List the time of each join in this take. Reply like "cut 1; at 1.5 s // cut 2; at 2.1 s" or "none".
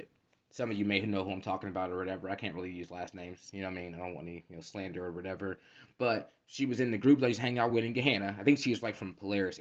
none